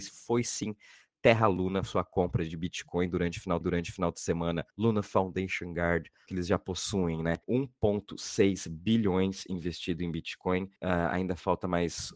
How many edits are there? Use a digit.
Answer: 6